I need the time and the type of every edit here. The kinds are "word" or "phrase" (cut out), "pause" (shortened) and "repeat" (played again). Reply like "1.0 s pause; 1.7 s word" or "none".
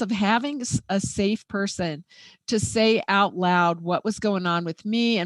none